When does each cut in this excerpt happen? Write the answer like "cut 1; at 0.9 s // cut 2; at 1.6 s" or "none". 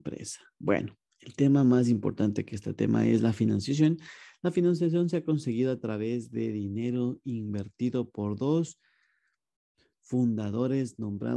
none